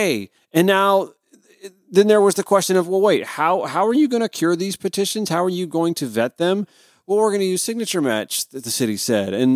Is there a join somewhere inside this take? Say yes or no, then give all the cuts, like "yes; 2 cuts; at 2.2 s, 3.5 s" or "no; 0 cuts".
no; 0 cuts